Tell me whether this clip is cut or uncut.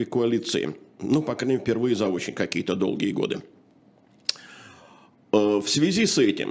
uncut